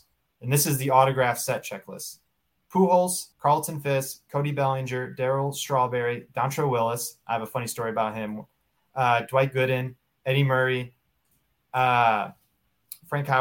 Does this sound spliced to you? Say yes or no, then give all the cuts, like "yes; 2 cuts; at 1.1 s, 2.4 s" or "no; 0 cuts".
yes; 1 cut; at 3.3 s